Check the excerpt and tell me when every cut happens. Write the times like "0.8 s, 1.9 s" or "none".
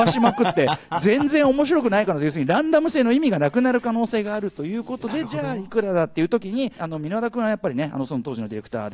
6.8 s